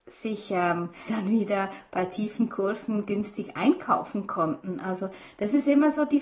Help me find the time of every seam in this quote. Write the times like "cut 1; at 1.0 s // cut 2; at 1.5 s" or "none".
cut 1; at 1.1 s